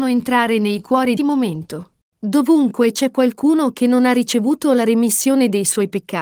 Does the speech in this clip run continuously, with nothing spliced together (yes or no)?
no